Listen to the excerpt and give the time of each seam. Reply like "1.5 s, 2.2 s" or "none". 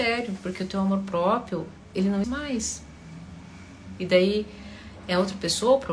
2.2 s